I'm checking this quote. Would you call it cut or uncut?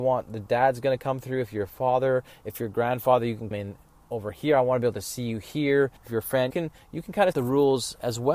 cut